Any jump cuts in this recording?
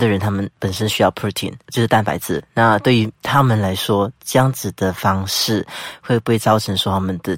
no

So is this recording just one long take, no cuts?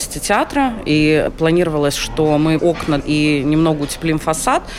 no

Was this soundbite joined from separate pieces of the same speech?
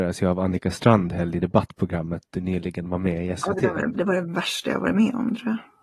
yes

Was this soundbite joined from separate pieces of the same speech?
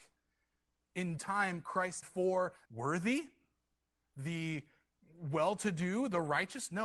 yes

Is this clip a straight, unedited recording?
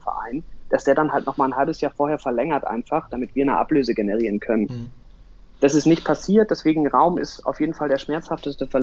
yes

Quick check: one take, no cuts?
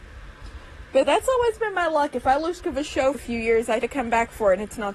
no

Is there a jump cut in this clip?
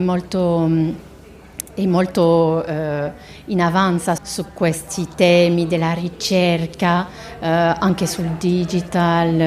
yes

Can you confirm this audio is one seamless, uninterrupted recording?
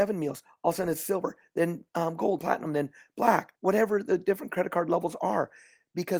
no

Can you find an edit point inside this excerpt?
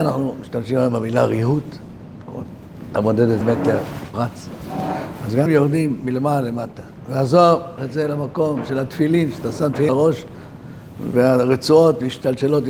yes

